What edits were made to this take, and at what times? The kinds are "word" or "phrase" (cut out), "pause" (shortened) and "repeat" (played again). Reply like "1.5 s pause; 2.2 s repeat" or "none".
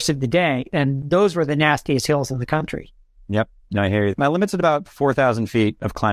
none